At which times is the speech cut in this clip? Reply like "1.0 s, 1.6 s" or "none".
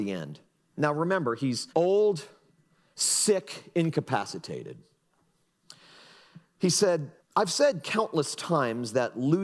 1.7 s, 7.2 s

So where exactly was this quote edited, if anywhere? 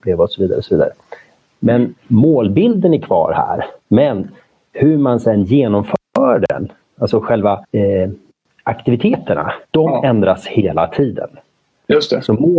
2.0 s, 3.8 s, 7.6 s, 9.6 s

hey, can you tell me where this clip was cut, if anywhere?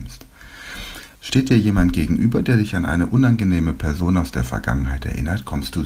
1.1 s

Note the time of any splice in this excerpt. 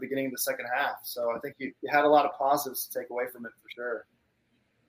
1.8 s

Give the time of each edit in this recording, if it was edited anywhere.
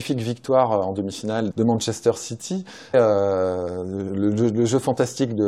1.5 s, 2.9 s

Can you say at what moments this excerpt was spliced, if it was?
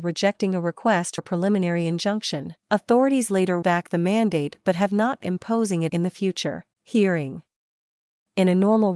1.2 s, 2.6 s, 3.6 s, 5.2 s, 5.9 s, 6.7 s

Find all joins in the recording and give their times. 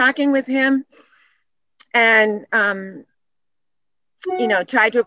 2.5 s

